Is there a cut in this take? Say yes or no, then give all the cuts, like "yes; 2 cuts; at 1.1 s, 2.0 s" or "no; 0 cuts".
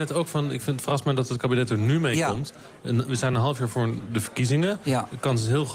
no; 0 cuts